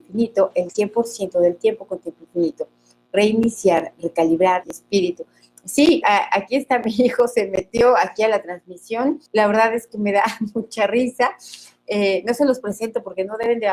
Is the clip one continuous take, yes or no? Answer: no